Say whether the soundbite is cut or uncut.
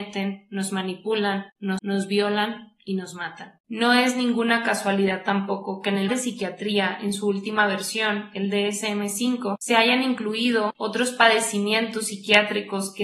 cut